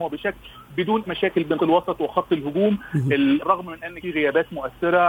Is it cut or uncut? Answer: cut